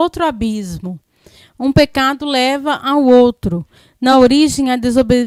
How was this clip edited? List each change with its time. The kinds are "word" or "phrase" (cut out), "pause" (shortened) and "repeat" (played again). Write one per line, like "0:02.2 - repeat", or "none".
none